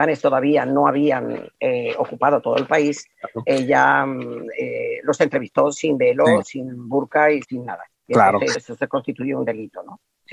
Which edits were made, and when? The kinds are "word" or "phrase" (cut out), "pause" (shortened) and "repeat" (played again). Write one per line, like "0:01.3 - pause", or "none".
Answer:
0:07.4 - word
0:07.9 - pause
0:08.5 - word